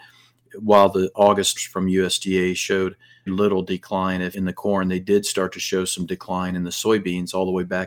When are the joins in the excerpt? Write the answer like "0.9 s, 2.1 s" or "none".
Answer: 1.1 s, 1.6 s, 3.3 s, 4.3 s